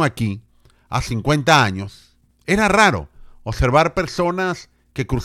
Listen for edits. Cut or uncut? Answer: cut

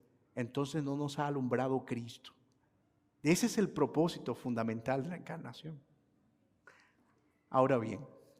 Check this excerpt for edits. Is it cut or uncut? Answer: cut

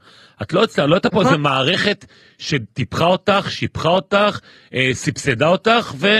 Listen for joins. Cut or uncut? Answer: uncut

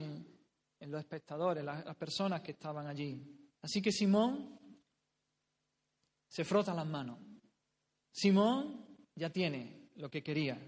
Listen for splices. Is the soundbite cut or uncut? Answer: cut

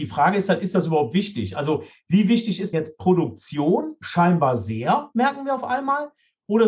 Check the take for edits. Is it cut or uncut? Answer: cut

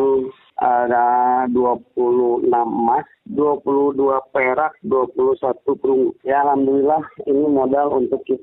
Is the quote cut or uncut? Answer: uncut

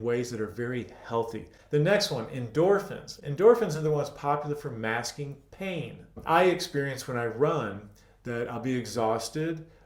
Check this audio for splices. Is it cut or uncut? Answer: uncut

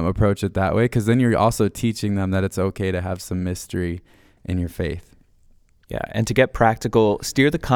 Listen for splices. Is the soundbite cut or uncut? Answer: uncut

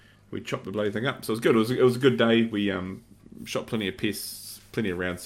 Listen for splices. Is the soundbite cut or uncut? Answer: uncut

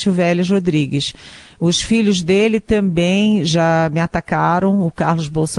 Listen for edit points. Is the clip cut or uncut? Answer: uncut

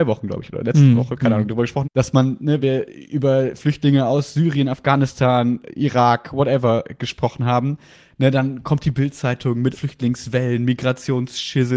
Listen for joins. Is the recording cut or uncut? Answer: cut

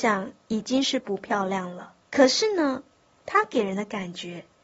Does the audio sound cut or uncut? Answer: cut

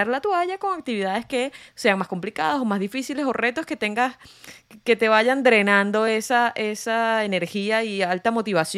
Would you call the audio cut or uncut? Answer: uncut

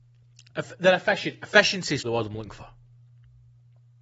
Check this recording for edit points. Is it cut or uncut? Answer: cut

